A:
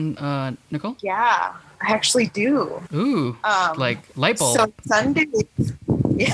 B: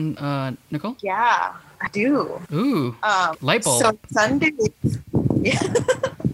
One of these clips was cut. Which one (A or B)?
B